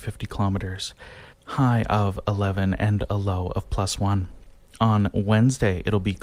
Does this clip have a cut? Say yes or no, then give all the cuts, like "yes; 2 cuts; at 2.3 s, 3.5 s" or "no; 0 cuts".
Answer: yes; 1 cut; at 1.3 s